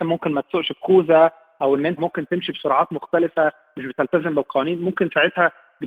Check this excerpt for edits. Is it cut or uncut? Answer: cut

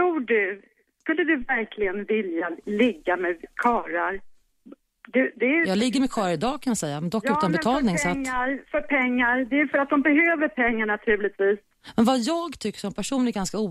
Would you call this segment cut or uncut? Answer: uncut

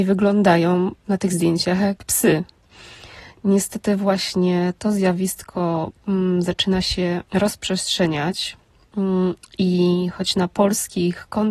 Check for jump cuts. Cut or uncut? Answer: cut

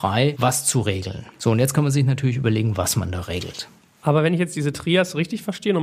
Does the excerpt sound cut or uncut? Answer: uncut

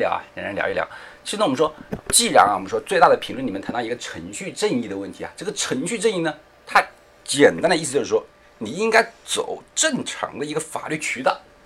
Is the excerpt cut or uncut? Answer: uncut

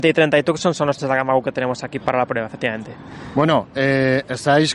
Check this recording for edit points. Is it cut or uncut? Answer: cut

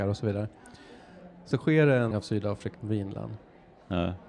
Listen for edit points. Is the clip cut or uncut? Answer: cut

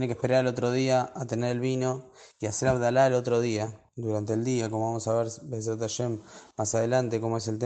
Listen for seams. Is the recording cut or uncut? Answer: uncut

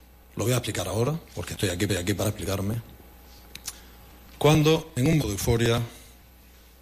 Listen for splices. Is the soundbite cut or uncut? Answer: cut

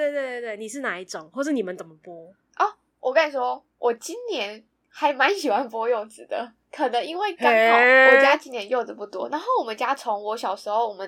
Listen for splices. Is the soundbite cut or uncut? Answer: uncut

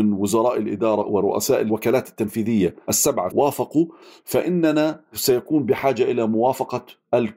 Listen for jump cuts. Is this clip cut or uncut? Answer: cut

